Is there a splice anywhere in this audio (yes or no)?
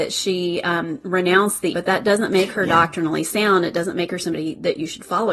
yes